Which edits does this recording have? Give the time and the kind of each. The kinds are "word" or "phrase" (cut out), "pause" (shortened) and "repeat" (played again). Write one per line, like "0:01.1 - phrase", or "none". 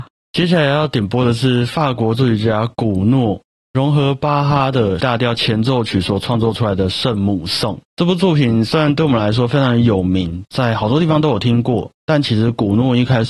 0:05.0 - word
0:07.8 - pause